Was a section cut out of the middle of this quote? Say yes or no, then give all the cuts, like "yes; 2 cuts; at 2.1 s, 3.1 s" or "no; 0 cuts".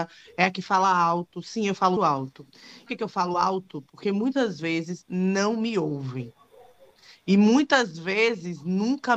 yes; 2 cuts; at 2.0 s, 2.9 s